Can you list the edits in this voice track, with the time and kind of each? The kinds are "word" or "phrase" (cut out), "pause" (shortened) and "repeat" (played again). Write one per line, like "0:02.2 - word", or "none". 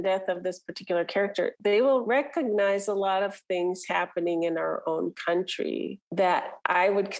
none